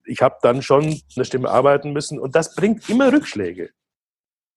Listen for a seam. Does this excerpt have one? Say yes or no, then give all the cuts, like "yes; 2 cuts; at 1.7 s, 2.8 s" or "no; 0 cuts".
yes; 1 cut; at 1.2 s